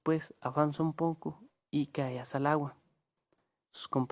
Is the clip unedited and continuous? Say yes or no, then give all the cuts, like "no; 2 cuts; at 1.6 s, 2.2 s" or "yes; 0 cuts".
yes; 0 cuts